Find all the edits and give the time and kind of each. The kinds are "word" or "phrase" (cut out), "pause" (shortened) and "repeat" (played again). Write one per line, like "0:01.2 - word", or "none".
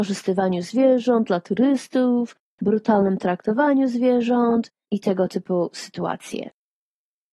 none